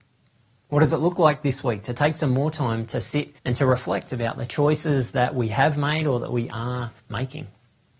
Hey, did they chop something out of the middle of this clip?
yes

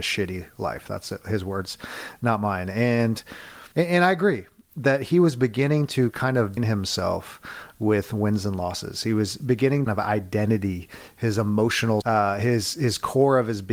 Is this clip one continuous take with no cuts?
no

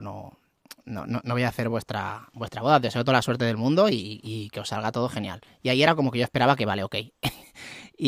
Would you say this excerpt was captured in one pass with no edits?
yes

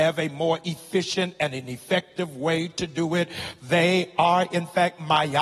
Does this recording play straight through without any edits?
yes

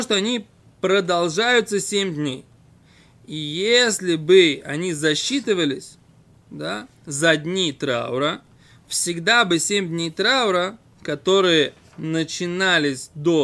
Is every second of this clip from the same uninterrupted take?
yes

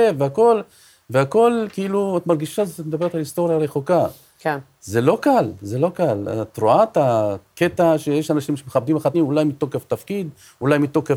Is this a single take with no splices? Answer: no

